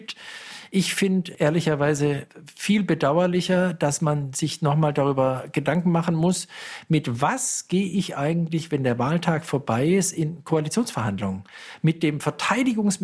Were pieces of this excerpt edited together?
no; 0 cuts

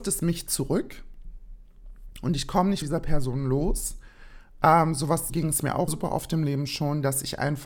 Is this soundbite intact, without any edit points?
no; 3 cuts; at 2.8 s, 5.3 s, 5.9 s

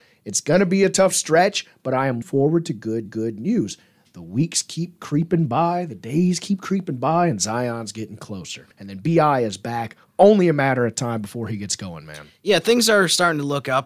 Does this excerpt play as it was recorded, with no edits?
no; 3 cuts; at 2.2 s, 3.1 s, 8.7 s

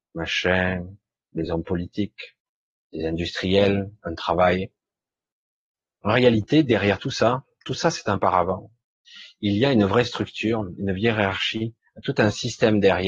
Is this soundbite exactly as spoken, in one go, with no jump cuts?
yes; 0 cuts

